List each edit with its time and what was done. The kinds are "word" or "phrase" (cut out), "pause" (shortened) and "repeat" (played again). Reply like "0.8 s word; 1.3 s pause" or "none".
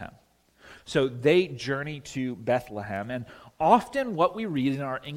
none